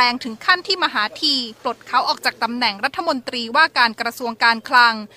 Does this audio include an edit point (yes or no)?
yes